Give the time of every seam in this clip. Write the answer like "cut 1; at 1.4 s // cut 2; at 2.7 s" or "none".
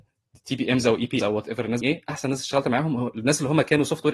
cut 1; at 1.2 s // cut 2; at 1.8 s